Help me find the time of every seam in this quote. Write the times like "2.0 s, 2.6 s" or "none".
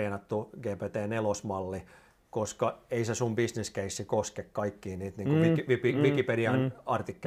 none